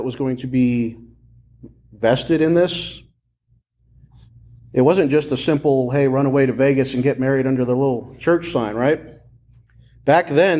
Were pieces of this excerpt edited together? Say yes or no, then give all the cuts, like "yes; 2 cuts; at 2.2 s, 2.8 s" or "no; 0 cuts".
no; 0 cuts